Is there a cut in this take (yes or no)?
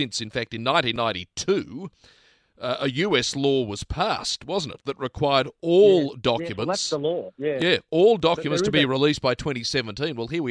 no